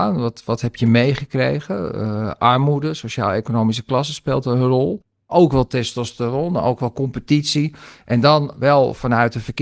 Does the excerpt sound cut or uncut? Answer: cut